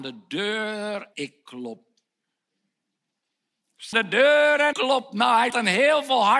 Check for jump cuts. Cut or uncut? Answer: cut